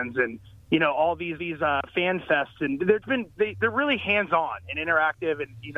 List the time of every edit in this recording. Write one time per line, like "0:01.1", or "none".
0:01.4
0:03.0